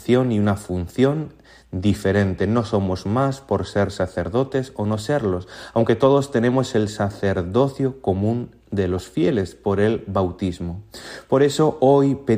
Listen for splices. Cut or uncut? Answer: uncut